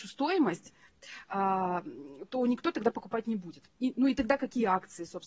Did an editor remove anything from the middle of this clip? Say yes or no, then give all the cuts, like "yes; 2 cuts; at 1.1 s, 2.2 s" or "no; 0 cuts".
yes; 1 cut; at 3.7 s